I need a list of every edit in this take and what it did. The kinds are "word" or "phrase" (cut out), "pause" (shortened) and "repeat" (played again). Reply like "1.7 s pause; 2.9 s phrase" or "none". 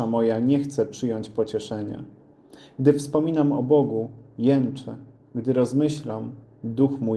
none